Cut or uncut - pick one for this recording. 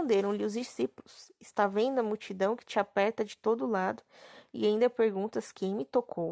uncut